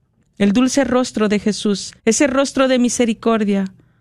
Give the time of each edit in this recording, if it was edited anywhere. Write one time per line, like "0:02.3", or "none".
0:02.0